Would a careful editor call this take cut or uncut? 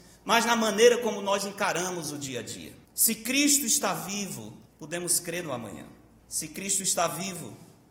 cut